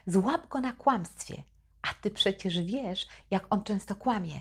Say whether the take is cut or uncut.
uncut